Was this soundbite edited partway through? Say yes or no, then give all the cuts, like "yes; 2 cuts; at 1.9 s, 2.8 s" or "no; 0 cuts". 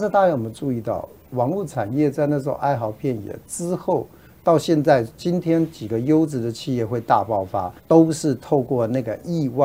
yes; 1 cut; at 7.8 s